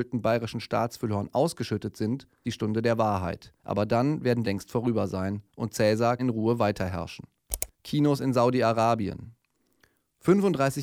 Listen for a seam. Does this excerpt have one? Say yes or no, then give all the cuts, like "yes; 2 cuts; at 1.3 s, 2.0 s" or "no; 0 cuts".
yes; 6 cuts; at 2.4 s, 3.6 s, 4.4 s, 5.5 s, 6.2 s, 7.7 s